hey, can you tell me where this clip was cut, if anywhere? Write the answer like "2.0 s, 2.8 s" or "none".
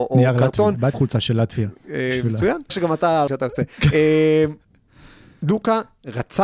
0.9 s, 2.7 s, 3.3 s